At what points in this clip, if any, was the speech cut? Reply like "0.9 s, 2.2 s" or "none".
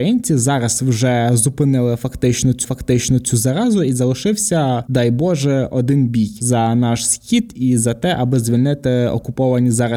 2.6 s